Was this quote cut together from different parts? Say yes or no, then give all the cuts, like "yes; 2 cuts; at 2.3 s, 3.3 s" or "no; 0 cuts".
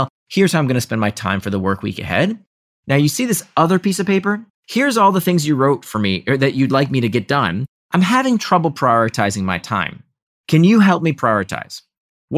yes; 1 cut; at 4.5 s